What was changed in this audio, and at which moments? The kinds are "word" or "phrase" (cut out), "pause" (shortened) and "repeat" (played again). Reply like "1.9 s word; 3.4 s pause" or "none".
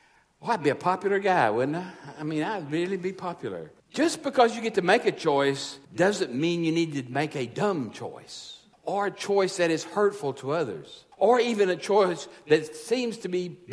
3.8 s pause; 5.8 s pause; 8.7 s pause; 11.1 s pause